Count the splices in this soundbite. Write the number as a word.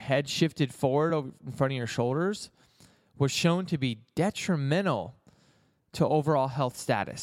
zero